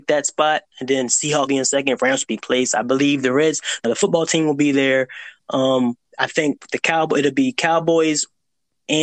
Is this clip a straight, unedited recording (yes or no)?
no